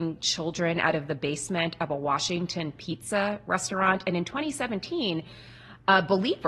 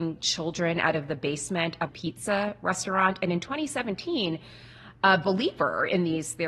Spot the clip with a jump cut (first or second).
second